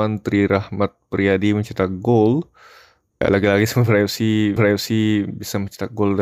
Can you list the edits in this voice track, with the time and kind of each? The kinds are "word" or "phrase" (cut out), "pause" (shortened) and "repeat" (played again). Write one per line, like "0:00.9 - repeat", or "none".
0:03.2 - word
0:04.6 - repeat